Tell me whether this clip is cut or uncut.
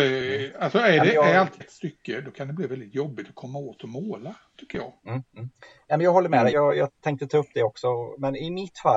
cut